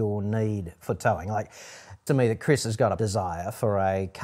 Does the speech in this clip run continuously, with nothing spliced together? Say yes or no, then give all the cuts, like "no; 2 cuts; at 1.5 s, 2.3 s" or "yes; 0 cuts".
no; 2 cuts; at 2.1 s, 3.0 s